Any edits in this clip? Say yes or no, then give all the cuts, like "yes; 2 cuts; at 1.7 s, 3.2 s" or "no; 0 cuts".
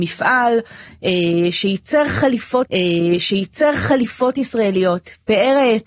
yes; 1 cut; at 2.7 s